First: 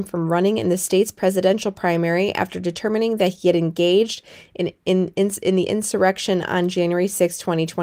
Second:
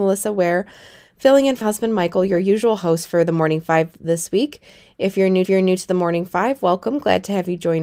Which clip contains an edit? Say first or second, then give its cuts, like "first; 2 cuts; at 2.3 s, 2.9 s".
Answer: second; 3 cuts; at 1.6 s, 4.0 s, 5.5 s